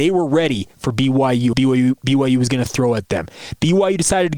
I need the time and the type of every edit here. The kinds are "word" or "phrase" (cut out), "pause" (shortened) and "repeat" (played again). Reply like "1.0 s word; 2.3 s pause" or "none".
1.5 s phrase

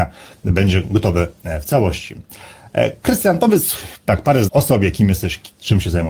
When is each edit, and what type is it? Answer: 4.5 s word

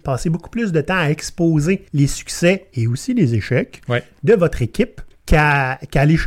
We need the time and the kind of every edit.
1.9 s pause; 5.1 s word

